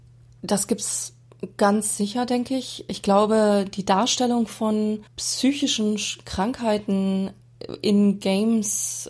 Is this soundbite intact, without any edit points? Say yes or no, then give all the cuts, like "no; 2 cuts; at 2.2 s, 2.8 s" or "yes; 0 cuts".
no; 1 cut; at 5.1 s